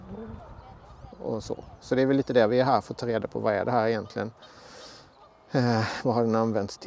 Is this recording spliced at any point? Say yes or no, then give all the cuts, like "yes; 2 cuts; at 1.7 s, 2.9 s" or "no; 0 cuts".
no; 0 cuts